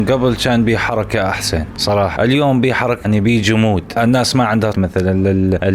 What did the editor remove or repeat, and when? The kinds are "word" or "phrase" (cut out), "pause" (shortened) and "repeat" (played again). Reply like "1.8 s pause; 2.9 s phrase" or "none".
2.2 s word; 3.0 s word; 4.7 s word